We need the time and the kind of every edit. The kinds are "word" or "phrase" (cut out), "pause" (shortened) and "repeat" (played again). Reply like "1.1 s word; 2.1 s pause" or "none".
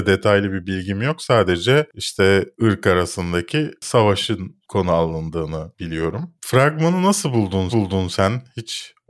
2.5 s word; 7.7 s repeat